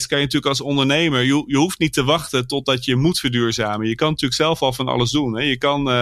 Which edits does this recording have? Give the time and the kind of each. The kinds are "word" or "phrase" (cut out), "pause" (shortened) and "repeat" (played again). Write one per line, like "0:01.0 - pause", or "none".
none